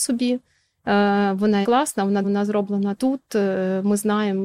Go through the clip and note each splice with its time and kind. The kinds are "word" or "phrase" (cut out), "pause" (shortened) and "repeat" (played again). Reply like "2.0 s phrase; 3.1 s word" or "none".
1.6 s word; 2.2 s word; 2.9 s word